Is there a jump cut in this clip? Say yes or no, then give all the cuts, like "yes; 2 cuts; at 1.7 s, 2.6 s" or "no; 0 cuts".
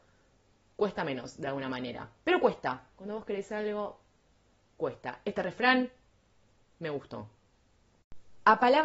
no; 0 cuts